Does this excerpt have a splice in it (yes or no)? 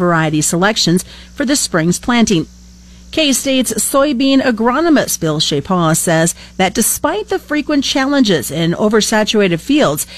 no